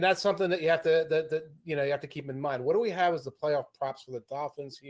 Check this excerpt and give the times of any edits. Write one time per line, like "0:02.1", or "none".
none